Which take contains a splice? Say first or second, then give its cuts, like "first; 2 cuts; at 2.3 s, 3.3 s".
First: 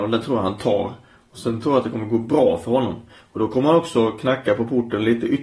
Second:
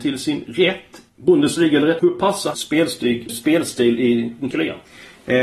second; 5 cuts; at 1.1 s, 2.0 s, 2.5 s, 3.3 s, 4.5 s